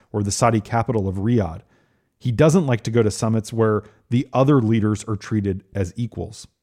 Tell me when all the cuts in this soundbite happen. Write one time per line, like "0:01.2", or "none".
none